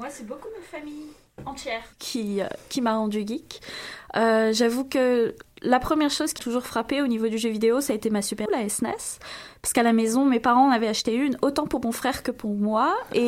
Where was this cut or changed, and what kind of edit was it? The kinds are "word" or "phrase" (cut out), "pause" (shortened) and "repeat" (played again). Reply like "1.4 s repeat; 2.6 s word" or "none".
1.9 s pause; 6.4 s word; 8.5 s word